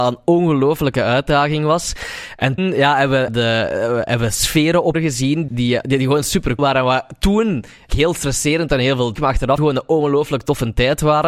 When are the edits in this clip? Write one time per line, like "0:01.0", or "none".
0:02.6
0:03.3
0:04.9
0:05.5
0:06.6
0:07.9
0:09.1
0:09.6